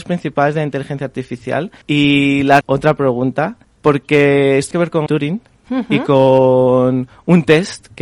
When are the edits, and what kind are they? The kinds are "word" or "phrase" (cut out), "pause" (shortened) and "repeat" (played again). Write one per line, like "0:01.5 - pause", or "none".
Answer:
0:01.8 - pause
0:02.6 - phrase
0:03.6 - pause
0:04.7 - word
0:05.1 - word